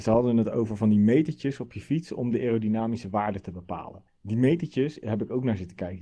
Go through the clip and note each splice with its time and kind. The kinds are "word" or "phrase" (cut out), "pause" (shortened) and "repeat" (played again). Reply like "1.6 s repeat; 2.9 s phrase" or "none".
4.1 s pause

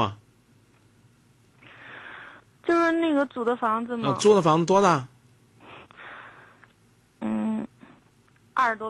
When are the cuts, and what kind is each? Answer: none

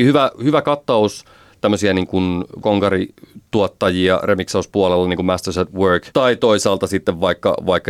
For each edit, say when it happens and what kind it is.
2.6 s word; 6.1 s word

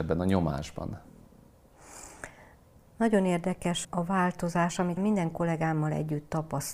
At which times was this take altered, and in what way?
3.8 s word; 5.0 s word

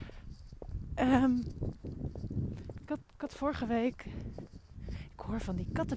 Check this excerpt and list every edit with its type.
3.1 s pause

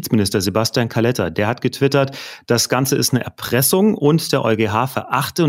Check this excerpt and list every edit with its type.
none

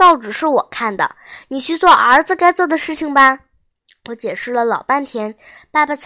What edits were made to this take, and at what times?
3.7 s pause

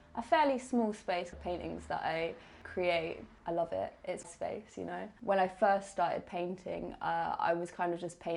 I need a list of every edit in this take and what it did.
1.3 s phrase; 4.2 s word; 5.2 s pause

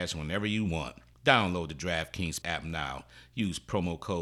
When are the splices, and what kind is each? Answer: 1.1 s pause; 2.4 s word

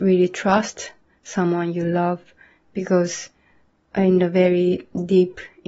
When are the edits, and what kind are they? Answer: none

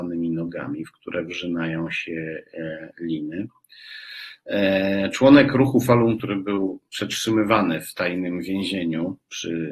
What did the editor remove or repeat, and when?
6.2 s word

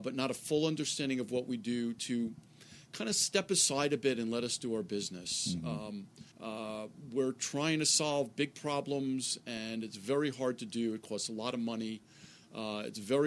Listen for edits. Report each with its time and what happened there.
6.3 s pause

